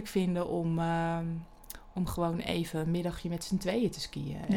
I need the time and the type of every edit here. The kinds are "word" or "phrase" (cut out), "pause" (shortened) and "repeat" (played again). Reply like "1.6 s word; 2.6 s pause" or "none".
none